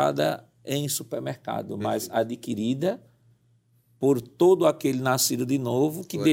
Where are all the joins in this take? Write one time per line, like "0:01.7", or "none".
none